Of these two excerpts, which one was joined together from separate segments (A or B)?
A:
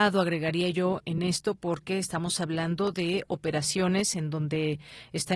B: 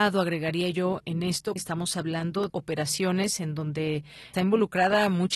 B